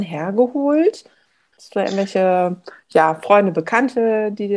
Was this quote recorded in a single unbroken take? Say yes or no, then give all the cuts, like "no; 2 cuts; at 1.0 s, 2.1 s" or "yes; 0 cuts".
yes; 0 cuts